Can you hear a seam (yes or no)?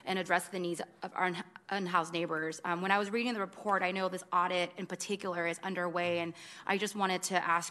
no